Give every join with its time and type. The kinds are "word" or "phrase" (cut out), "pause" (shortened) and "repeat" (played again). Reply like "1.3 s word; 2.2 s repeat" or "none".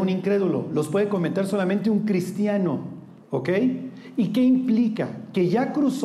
3.2 s pause